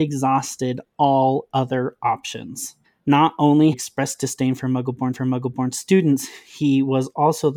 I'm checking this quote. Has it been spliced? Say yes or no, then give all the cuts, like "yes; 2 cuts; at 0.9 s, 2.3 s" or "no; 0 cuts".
yes; 3 cuts; at 2.8 s, 3.7 s, 5.1 s